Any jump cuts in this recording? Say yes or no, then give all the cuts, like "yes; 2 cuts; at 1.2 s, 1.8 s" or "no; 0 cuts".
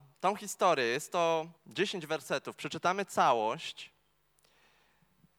yes; 1 cut; at 1.6 s